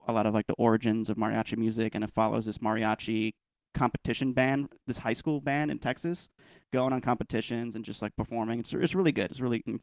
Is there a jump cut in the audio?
no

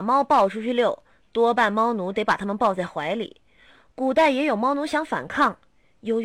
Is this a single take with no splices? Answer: yes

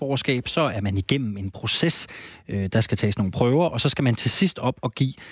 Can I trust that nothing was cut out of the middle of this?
yes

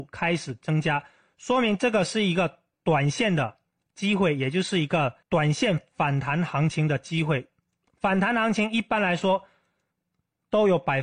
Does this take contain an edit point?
yes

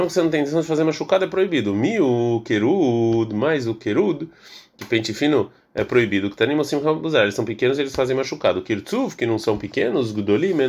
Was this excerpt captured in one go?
yes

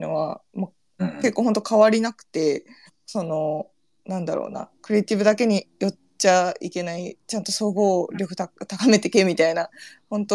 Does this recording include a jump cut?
yes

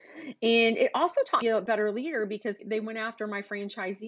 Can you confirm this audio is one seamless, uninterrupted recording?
no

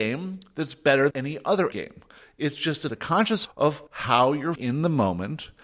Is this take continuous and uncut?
no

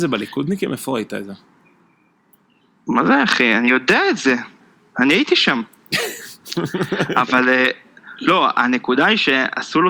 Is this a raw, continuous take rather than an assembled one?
yes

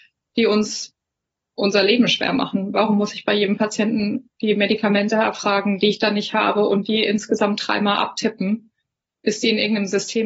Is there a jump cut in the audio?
no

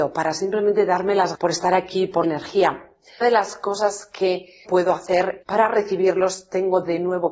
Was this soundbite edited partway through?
yes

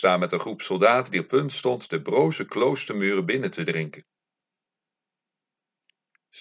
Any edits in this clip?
no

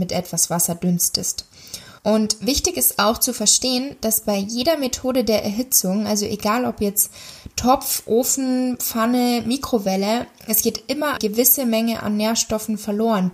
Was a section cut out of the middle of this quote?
yes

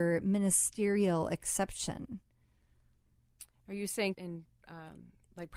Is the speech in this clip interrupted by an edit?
yes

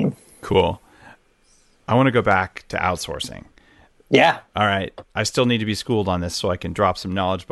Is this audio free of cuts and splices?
yes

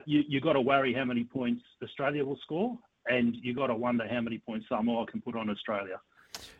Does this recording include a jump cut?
no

